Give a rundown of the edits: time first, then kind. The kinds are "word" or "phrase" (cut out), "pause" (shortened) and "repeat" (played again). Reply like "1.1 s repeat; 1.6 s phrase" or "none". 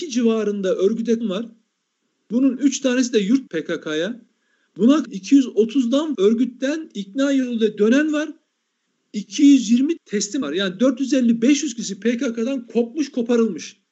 1.2 s word; 3.5 s word; 5.0 s word; 6.1 s word; 10.0 s word; 10.4 s word